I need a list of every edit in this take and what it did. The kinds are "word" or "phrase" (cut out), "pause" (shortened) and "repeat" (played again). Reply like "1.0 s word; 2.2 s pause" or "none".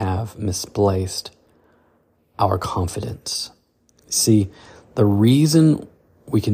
none